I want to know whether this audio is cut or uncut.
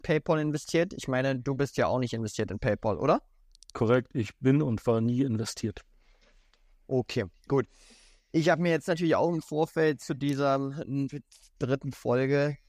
uncut